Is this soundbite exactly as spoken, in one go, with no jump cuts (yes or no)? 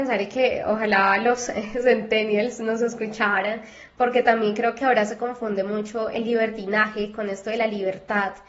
yes